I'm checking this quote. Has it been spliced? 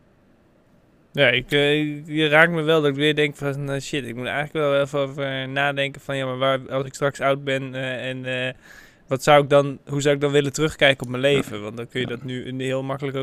no; 0 cuts

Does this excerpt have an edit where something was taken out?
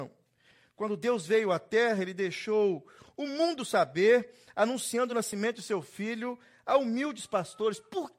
no; 0 cuts

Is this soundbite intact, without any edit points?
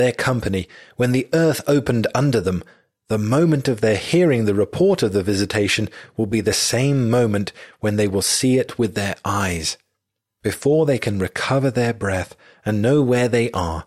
yes; 0 cuts

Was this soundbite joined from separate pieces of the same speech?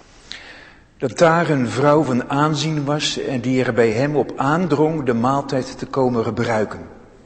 no; 0 cuts

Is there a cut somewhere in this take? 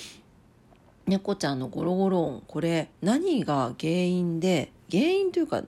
yes; 1 cut; at 2.9 s

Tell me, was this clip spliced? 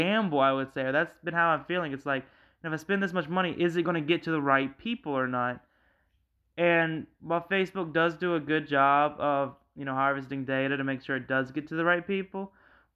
no; 0 cuts

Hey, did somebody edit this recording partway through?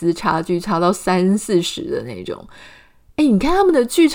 no; 0 cuts

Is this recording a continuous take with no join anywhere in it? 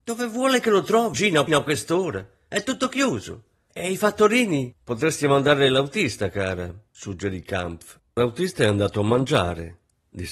no; 5 cuts; at 1.1 s, 1.5 s, 4.7 s, 6.9 s, 8.1 s

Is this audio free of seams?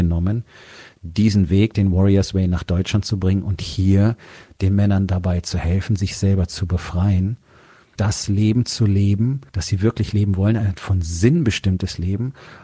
no; 2 cuts; at 8.0 s, 9.5 s

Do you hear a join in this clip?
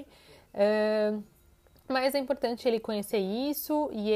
no; 0 cuts

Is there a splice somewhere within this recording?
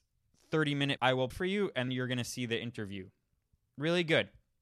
yes; 3 cuts; at 1.0 s, 1.3 s, 1.9 s

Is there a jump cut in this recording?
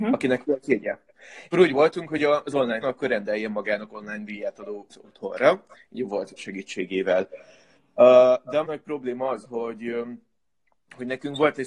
yes; 6 cuts; at 1.5 s, 2.8 s, 4.9 s, 6.4 s, 8.6 s, 9.4 s

